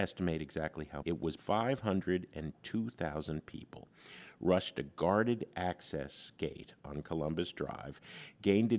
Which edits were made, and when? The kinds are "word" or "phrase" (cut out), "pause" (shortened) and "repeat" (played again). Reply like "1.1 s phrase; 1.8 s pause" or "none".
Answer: 1.0 s word; 1.4 s word

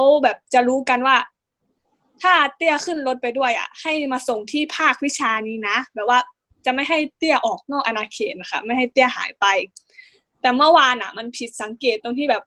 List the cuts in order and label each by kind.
none

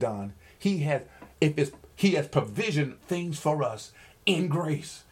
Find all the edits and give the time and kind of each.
3.0 s word

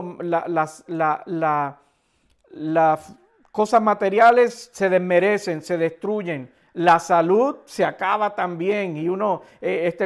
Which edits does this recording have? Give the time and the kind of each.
none

